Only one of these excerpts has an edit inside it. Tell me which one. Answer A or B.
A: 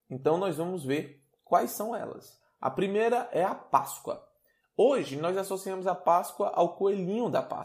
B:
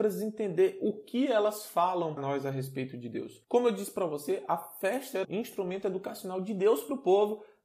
B